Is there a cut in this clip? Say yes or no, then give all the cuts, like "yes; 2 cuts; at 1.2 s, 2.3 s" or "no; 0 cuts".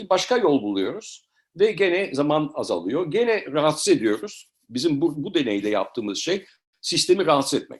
no; 0 cuts